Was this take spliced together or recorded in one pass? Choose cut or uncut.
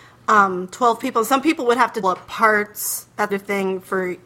cut